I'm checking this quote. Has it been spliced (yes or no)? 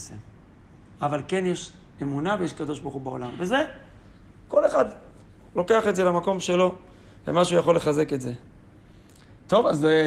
no